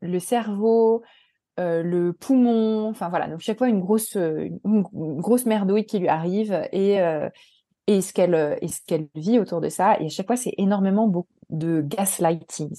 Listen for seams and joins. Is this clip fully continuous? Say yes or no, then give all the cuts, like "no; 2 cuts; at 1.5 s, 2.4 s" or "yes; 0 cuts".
yes; 0 cuts